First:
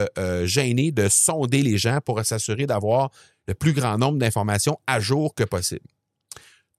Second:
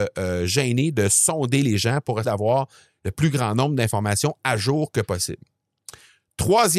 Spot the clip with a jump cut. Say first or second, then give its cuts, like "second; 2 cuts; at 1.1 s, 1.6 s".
second; 1 cut; at 2.2 s